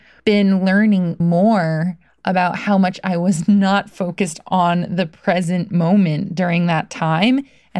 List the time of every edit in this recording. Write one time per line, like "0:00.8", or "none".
0:01.2